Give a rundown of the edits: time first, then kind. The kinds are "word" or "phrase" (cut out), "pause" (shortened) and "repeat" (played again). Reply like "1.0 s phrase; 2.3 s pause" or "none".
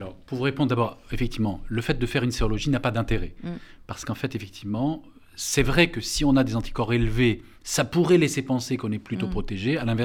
none